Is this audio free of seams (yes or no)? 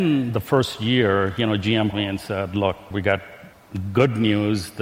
no